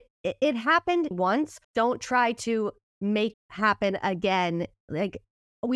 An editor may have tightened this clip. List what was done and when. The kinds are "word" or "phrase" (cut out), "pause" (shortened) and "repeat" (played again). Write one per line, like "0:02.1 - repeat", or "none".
0:01.1 - word
0:01.6 - pause
0:03.3 - word